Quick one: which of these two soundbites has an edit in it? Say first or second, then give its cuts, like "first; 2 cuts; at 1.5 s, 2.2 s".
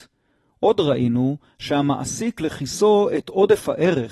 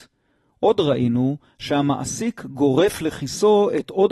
first; 1 cut; at 2.4 s